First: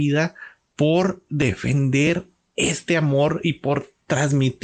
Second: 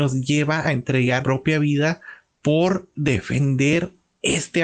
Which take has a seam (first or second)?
second